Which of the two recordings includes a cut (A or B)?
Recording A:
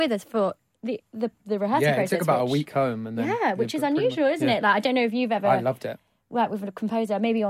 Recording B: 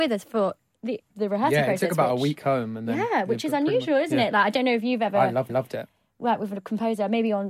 B